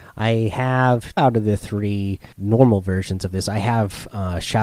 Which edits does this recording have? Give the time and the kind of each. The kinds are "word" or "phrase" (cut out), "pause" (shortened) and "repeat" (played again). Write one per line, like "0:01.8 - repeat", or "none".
0:01.2 - word
0:02.3 - pause